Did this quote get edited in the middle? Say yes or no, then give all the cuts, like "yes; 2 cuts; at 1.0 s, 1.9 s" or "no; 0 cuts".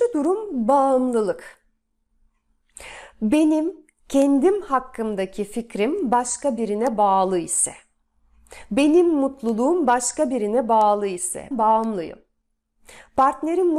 yes; 1 cut; at 11.5 s